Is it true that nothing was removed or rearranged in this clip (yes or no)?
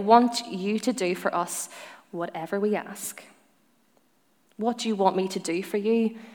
yes